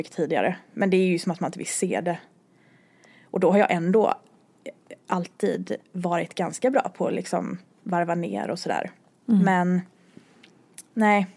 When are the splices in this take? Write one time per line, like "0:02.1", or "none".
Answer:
none